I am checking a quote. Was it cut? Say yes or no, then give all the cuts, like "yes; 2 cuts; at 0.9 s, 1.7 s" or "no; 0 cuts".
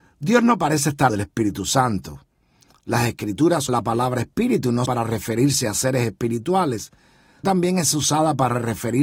yes; 4 cuts; at 1.1 s, 3.7 s, 4.9 s, 7.4 s